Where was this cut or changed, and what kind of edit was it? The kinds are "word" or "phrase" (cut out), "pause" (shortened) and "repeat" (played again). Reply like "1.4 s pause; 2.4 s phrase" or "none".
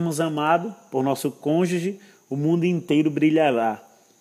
none